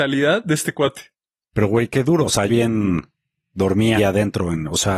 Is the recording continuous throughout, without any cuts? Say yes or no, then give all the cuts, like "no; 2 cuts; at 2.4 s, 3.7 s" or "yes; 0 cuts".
no; 3 cuts; at 1.9 s, 2.5 s, 4.0 s